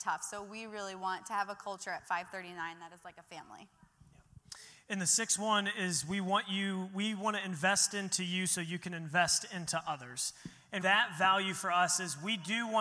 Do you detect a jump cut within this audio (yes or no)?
yes